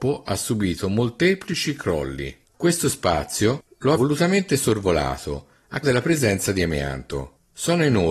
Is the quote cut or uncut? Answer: cut